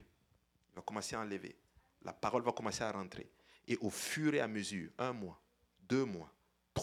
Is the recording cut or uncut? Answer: uncut